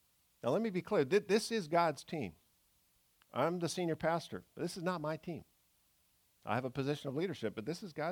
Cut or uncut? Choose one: uncut